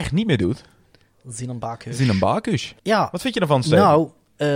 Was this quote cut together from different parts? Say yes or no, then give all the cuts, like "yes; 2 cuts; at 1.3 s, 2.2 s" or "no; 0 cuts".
yes; 1 cut; at 2.8 s